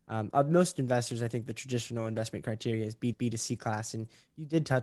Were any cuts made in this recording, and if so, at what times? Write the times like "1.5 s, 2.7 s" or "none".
3.1 s